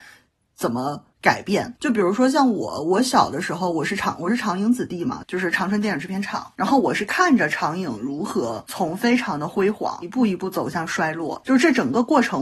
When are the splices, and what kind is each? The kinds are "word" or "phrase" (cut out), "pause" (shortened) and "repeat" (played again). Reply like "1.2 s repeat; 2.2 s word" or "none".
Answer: 1.1 s pause; 1.8 s pause